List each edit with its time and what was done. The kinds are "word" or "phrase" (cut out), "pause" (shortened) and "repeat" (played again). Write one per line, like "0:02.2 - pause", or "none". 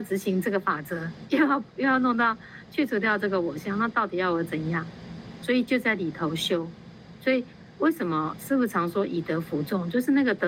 0:07.7 - pause